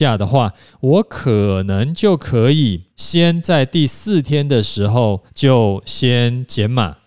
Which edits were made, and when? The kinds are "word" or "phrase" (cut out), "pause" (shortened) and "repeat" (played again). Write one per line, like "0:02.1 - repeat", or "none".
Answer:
0:02.9 - pause
0:05.3 - pause

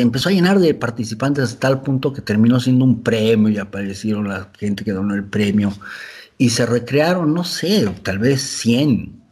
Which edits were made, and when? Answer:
none

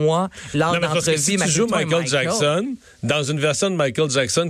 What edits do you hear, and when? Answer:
none

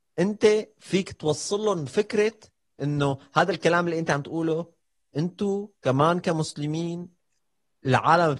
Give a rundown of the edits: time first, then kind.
0:05.0 - pause

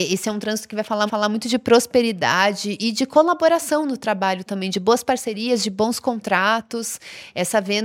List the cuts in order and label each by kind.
0:01.1 - repeat

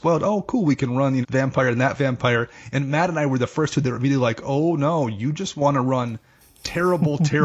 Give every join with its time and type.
0:01.2 - phrase

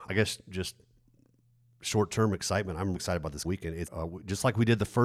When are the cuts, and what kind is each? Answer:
0:02.9 - word
0:03.4 - word
0:03.9 - word

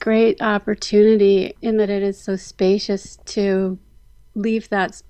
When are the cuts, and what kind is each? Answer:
none

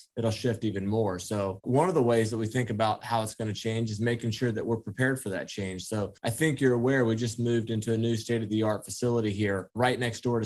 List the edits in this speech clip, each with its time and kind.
0:06.2 - pause

